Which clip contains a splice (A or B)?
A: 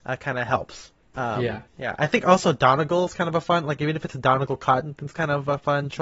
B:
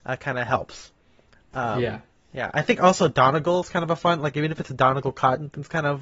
A